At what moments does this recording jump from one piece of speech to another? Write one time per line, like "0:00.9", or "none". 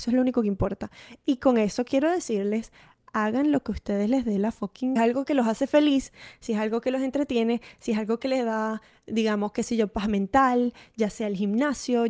0:05.0

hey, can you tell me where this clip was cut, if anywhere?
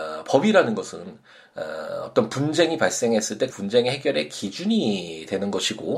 0:03.5

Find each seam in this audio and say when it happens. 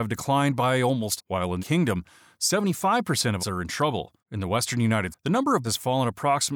0:01.2
0:01.6
0:03.4
0:04.2
0:05.1
0:05.6

